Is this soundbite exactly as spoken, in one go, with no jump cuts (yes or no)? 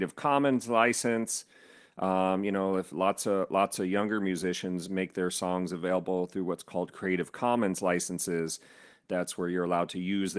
yes